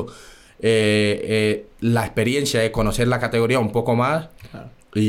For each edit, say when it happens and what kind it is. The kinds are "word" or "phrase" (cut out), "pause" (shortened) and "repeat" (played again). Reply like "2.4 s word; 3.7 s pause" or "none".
none